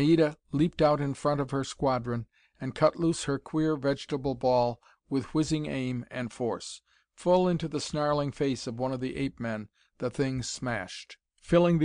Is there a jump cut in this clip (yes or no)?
no